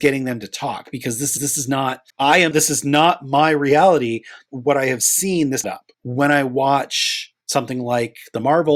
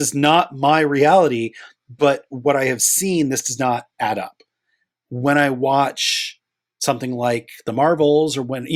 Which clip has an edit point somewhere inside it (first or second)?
first